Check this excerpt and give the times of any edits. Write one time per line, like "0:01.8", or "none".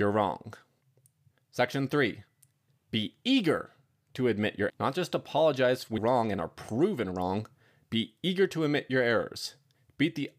0:04.7
0:06.0

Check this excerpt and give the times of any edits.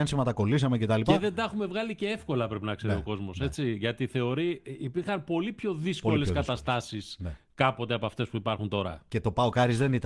none

